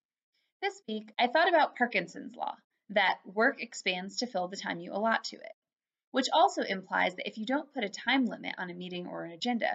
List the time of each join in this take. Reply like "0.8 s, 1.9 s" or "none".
none